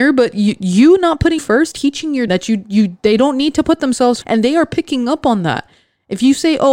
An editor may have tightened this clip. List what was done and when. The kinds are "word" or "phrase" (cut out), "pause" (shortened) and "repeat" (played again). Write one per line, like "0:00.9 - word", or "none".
0:01.4 - word
0:01.7 - word
0:02.3 - word
0:04.2 - word